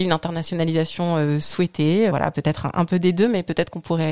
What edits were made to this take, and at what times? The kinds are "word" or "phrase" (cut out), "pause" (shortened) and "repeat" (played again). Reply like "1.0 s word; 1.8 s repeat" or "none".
2.1 s word